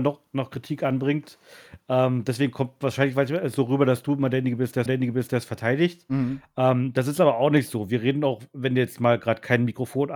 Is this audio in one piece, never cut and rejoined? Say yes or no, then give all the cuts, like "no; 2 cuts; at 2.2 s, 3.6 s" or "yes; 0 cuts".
no; 1 cut; at 4.9 s